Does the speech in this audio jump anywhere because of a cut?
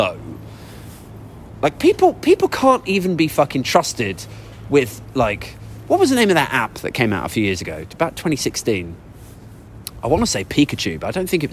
no; 0 cuts

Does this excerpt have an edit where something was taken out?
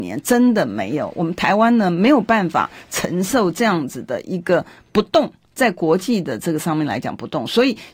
no; 0 cuts

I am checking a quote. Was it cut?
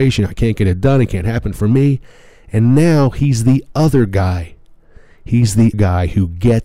yes; 1 cut; at 5.7 s

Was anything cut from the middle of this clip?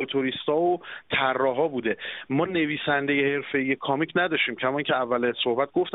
no; 0 cuts

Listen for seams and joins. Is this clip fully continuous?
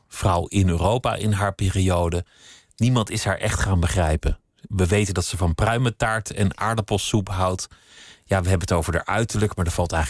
yes; 0 cuts

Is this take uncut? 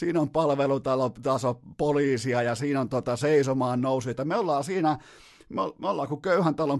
yes; 0 cuts

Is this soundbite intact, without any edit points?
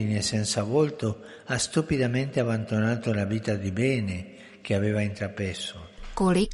yes; 0 cuts

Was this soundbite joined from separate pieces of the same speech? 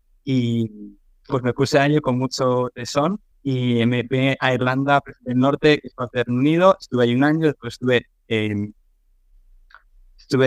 yes; 2 cuts; at 1.3 s, 3.3 s

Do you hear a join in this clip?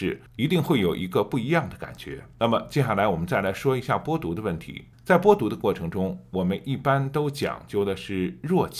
yes; 2 cuts; at 2.3 s, 4.9 s

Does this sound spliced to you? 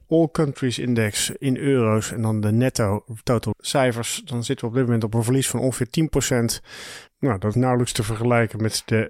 yes; 2 cuts; at 3.5 s, 7.5 s

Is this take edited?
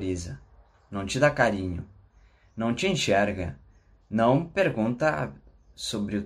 no; 0 cuts

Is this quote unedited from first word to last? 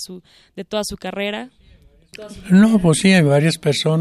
yes; 0 cuts

